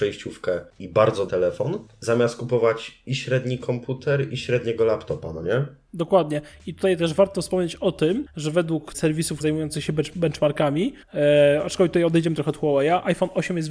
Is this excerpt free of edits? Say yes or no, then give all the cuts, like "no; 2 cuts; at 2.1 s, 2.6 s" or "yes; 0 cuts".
no; 4 cuts; at 1.3 s, 8.9 s, 9.4 s, 11.0 s